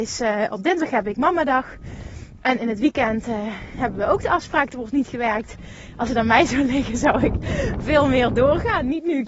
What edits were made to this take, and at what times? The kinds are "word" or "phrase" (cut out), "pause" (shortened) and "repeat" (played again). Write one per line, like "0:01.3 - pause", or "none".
none